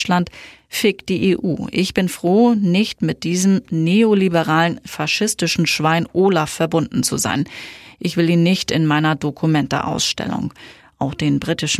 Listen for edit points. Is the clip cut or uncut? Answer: uncut